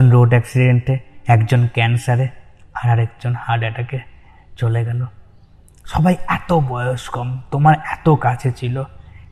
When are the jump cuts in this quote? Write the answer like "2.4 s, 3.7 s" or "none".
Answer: none